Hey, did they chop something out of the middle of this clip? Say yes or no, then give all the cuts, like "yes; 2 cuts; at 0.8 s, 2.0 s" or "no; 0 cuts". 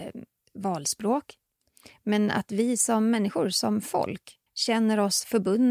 yes; 1 cut; at 4.5 s